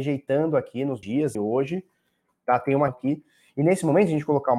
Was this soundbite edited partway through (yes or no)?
yes